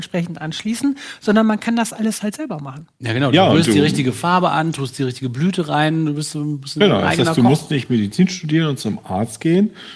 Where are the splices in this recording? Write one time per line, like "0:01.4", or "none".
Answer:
none